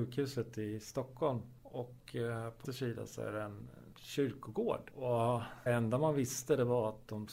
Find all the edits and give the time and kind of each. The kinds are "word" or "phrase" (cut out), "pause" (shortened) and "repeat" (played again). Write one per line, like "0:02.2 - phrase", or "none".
0:02.6 - word
0:03.9 - word
0:05.7 - word